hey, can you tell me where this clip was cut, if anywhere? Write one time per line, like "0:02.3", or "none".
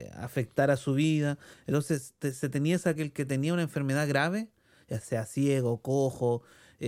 0:03.0
0:05.0